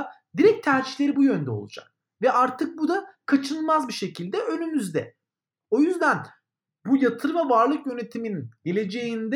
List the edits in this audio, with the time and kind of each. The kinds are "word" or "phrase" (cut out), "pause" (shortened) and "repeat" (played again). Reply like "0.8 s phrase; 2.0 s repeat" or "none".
none